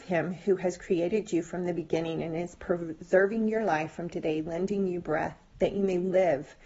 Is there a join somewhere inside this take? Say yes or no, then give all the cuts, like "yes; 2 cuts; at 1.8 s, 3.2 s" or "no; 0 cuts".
yes; 1 cut; at 4.1 s